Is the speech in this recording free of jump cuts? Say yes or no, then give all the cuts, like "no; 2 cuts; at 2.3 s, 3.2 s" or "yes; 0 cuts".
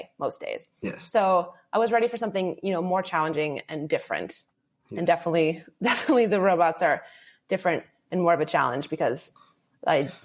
yes; 0 cuts